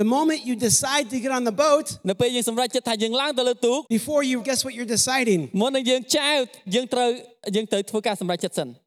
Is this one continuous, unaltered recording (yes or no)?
no